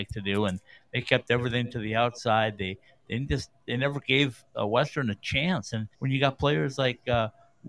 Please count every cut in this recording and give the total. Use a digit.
1